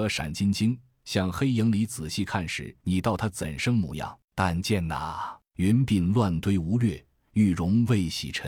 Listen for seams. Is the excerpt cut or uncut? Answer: cut